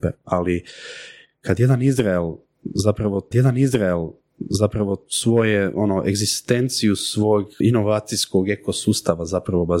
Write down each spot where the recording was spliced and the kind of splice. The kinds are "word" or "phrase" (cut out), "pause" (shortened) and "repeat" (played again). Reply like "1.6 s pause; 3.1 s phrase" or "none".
3.3 s repeat; 7.6 s word